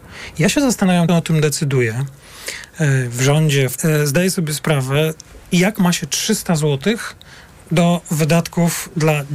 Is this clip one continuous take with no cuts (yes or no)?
no